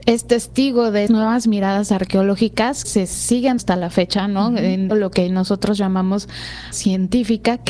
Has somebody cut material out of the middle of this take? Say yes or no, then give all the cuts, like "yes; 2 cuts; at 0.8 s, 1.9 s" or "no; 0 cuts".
yes; 5 cuts; at 1.1 s, 2.8 s, 3.6 s, 4.9 s, 6.7 s